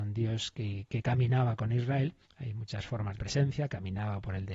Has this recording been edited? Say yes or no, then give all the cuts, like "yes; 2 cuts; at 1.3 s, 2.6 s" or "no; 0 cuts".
yes; 2 cuts; at 2.2 s, 3.2 s